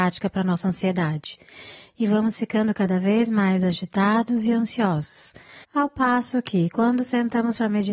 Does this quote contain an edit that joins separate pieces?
yes; 1 cut; at 5.6 s

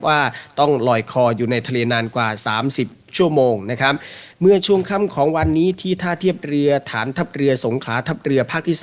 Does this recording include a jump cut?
no; 0 cuts

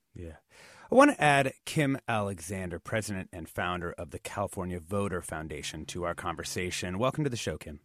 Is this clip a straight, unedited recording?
yes; 0 cuts

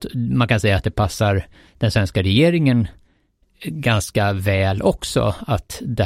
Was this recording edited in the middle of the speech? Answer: no; 0 cuts

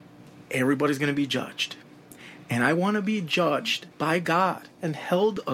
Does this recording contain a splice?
yes; 1 cut; at 3.9 s

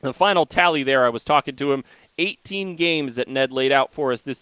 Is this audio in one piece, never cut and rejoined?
yes; 0 cuts

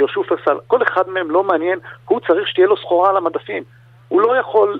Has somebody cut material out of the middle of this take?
no; 0 cuts

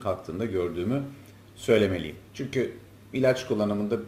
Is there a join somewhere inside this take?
no; 0 cuts

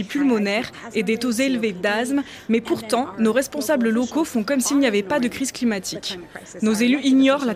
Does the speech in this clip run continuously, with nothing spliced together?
yes; 0 cuts

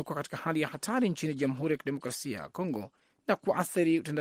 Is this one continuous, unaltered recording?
yes; 0 cuts

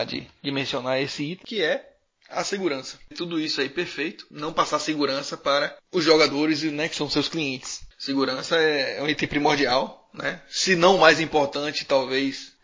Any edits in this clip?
yes; 1 cut; at 3.1 s

